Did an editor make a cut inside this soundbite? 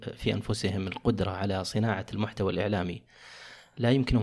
no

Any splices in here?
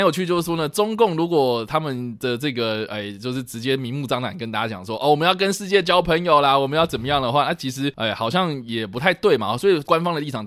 no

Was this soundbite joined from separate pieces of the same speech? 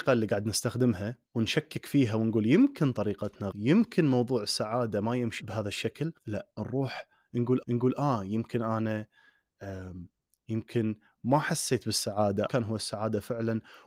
yes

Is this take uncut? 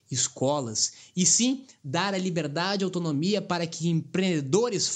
yes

